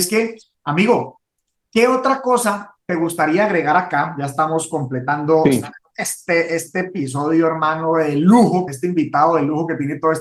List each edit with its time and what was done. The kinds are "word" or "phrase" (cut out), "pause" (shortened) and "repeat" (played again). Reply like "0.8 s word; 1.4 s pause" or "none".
8.7 s word